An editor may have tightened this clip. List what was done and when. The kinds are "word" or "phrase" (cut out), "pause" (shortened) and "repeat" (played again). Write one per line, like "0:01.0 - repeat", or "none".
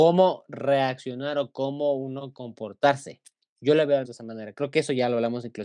0:04.0 - word